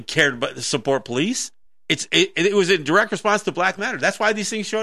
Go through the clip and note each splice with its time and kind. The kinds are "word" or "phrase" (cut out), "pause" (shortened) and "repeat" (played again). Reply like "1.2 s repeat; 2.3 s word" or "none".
1.6 s pause; 3.8 s word